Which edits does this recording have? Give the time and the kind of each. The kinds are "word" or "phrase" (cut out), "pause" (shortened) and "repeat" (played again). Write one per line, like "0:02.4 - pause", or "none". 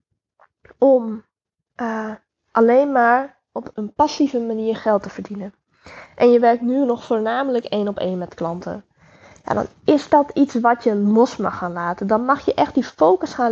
none